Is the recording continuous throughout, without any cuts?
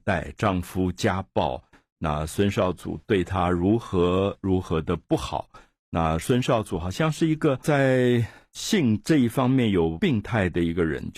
yes; 0 cuts

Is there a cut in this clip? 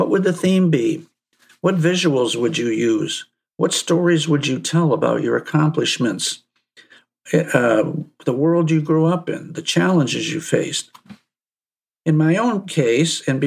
no; 0 cuts

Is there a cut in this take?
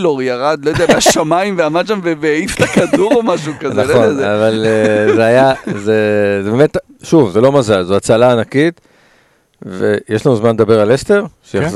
no; 0 cuts

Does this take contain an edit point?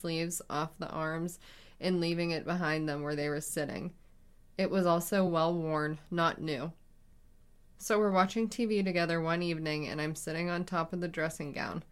no; 0 cuts

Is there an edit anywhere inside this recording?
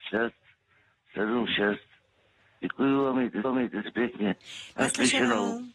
yes; 1 cut; at 3.4 s

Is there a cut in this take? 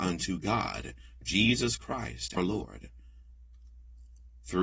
yes; 2 cuts; at 1.2 s, 2.4 s

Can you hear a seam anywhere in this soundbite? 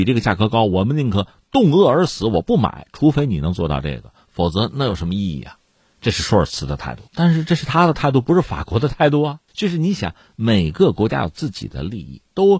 yes; 2 cuts; at 7.1 s, 9.5 s

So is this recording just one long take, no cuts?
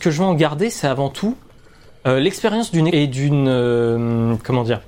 no; 1 cut; at 2.9 s

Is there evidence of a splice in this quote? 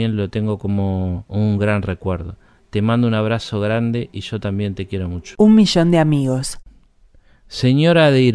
no; 0 cuts

